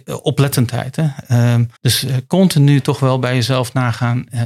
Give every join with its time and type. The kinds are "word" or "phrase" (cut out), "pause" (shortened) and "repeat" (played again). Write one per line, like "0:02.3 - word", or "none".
0:01.8 - pause